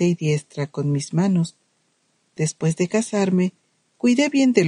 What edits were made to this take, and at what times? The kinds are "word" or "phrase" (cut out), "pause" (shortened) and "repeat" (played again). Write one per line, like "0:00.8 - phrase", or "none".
none